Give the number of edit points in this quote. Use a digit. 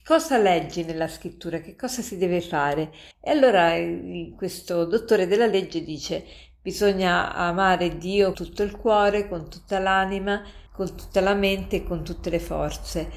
3